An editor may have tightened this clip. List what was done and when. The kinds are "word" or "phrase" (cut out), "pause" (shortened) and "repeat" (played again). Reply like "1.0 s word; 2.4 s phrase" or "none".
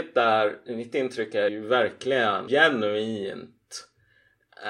1.5 s phrase; 2.5 s word